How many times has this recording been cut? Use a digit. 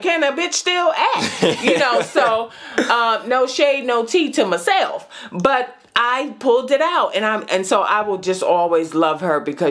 0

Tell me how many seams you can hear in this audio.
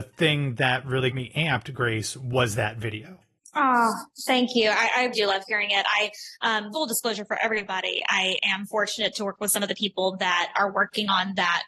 5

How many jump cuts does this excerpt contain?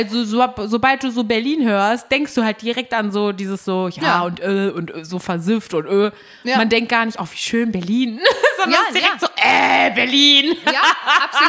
0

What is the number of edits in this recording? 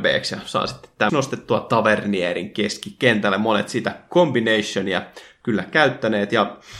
1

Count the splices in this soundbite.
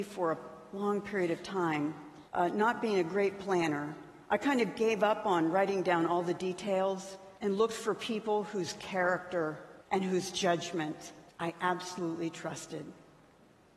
5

